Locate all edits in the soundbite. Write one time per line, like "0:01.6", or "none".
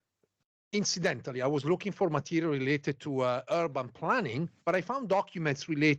0:04.6